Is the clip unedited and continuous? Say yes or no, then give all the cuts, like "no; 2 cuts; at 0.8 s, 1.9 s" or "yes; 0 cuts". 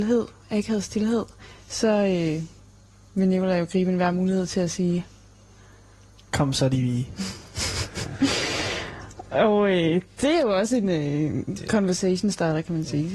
yes; 0 cuts